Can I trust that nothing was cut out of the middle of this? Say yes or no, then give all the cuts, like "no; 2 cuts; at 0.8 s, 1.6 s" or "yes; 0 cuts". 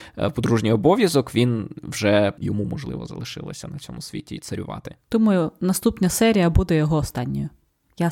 no; 1 cut; at 2.4 s